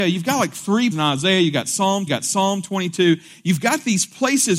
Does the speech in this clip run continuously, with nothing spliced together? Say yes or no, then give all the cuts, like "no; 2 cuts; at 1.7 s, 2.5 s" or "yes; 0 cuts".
no; 2 cuts; at 0.9 s, 2.1 s